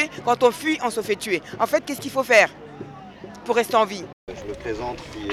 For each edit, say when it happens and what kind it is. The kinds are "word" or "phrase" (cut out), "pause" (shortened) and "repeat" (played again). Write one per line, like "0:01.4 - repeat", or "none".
0:04.2 - pause